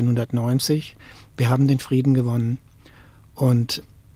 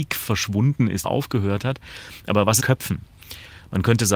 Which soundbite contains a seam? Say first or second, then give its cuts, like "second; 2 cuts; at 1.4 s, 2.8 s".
second; 2 cuts; at 1.0 s, 2.6 s